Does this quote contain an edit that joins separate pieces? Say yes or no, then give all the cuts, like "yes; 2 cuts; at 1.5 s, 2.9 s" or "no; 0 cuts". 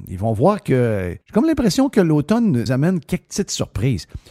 yes; 2 cuts; at 1.2 s, 2.7 s